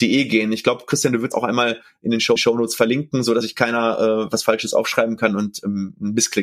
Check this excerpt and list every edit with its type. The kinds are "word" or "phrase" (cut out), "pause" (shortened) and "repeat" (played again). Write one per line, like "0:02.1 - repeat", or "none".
0:01.3 - word
0:02.4 - repeat
0:03.4 - word